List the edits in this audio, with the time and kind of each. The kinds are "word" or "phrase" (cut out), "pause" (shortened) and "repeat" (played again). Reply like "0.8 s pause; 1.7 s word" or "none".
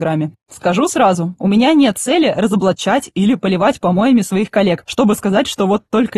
none